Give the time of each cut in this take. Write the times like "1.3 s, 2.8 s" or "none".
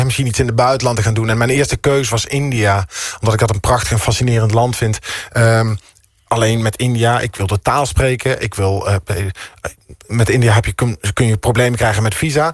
none